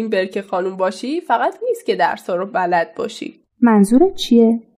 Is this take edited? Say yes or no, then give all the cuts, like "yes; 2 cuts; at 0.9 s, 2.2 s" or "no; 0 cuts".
yes; 1 cut; at 1.6 s